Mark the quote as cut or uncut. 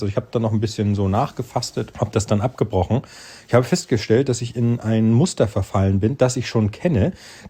cut